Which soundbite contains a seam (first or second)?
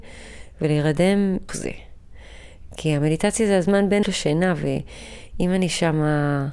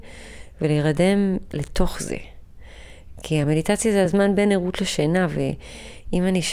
first